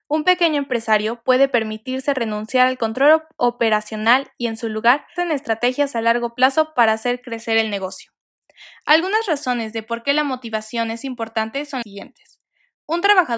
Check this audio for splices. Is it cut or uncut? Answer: cut